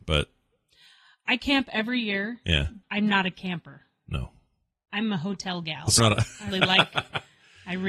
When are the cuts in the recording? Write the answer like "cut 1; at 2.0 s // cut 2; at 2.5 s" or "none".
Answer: cut 1; at 2.8 s // cut 2; at 6.0 s // cut 3; at 6.5 s